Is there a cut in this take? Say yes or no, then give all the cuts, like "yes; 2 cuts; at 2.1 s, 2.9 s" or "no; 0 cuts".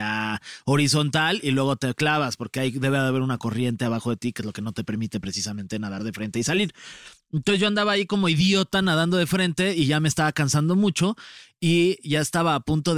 no; 0 cuts